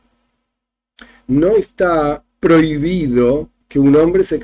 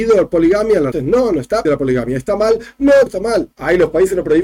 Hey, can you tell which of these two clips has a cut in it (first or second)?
second